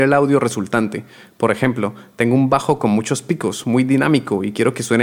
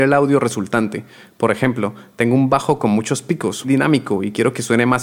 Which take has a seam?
second; 1 cut; at 3.6 s

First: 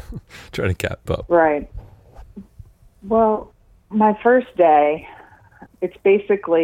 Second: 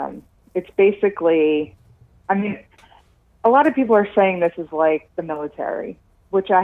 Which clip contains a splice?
first; 3 cuts; at 1.1 s, 3.8 s, 5.7 s

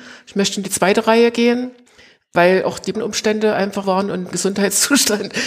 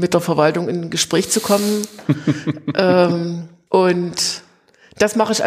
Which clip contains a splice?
first; 3 cuts; at 2.9 s, 3.8 s, 4.3 s

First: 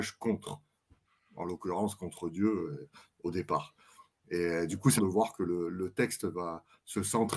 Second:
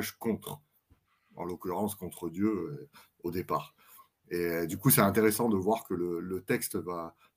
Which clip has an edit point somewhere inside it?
first; 1 cut; at 5.0 s

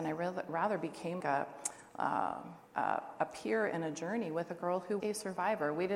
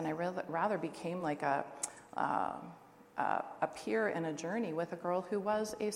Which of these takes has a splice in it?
first; 3 cuts; at 1.2 s, 2.7 s, 5.0 s

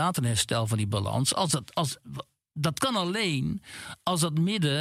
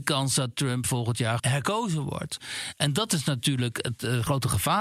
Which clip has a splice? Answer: second; 1 cut; at 1.4 s

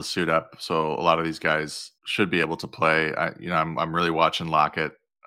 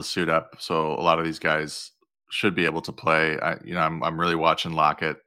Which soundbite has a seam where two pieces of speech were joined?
first; 1 cut; at 2.0 s

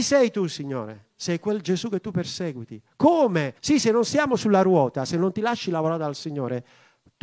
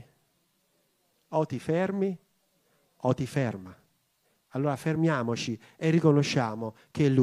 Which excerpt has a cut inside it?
first; 2 cuts; at 1.1 s, 3.6 s

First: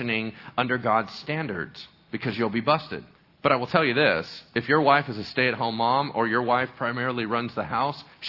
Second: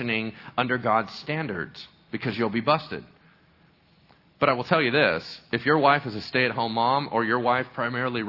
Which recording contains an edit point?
first; 1 cut; at 3.1 s

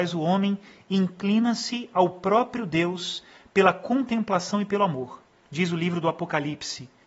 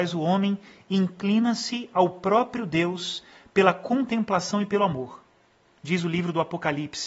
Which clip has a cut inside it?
first; 1 cut; at 5.3 s

